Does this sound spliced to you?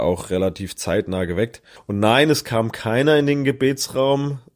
no; 0 cuts

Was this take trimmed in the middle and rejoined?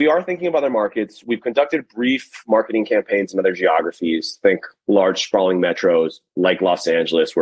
no; 0 cuts

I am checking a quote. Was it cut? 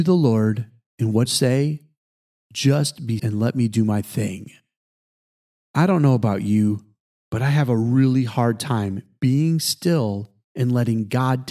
yes; 2 cuts; at 1.2 s, 3.2 s

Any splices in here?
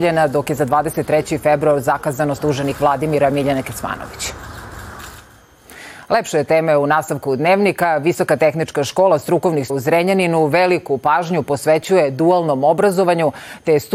yes; 2 cuts; at 2.4 s, 9.7 s

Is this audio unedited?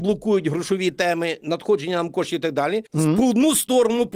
no; 1 cut; at 2.9 s

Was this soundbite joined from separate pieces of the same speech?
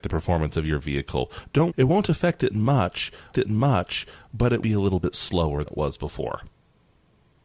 yes; 4 cuts; at 1.7 s, 3.3 s, 4.6 s, 5.7 s

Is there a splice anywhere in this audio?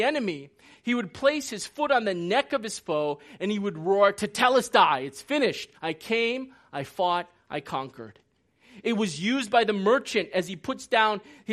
yes; 1 cut; at 5.8 s

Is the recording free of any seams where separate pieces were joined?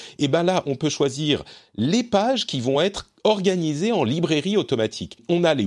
yes; 0 cuts

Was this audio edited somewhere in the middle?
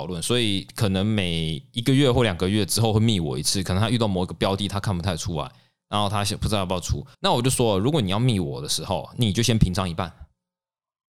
yes; 1 cut; at 7.1 s

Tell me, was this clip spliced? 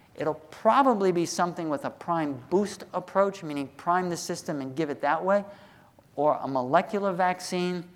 no; 0 cuts

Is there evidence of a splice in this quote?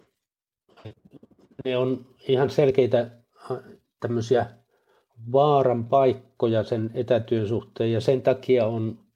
no; 0 cuts

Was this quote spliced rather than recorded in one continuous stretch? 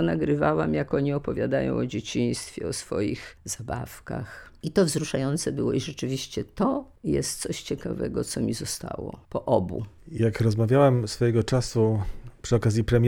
yes; 1 cut; at 9.2 s

